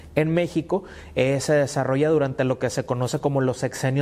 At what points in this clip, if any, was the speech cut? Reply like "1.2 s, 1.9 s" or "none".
none